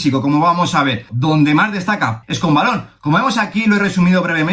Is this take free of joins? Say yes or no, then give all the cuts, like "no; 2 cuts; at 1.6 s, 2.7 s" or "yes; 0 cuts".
no; 2 cuts; at 1.1 s, 2.2 s